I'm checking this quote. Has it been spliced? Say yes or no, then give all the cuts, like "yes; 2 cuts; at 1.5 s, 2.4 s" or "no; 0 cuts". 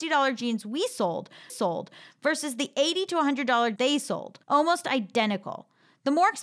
yes; 3 cuts; at 1.5 s, 3.8 s, 4.4 s